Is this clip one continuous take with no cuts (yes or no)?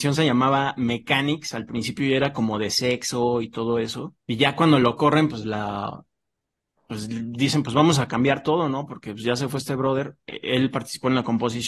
no